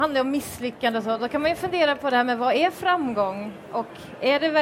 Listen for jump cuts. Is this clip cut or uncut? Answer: uncut